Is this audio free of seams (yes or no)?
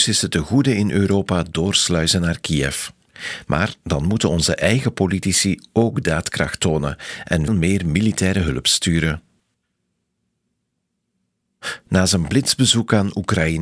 no